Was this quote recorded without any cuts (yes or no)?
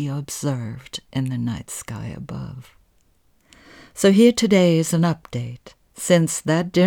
yes